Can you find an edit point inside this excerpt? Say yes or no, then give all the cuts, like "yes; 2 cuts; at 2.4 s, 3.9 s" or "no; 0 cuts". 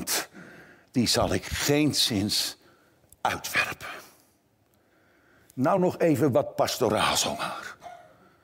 no; 0 cuts